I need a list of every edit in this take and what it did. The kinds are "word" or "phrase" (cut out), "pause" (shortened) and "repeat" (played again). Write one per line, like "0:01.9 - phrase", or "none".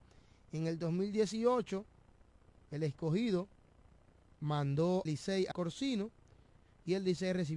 0:05.1 - word
0:05.5 - word

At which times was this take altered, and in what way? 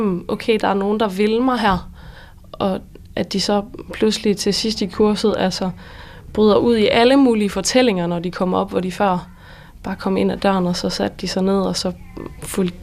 none

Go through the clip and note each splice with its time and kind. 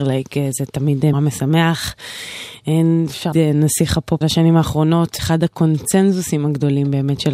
0:01.1 - word
0:03.3 - word
0:04.2 - word
0:05.2 - word

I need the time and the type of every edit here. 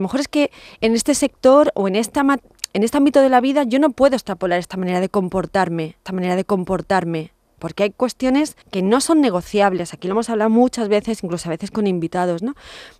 0:06.0 - repeat
0:08.6 - pause

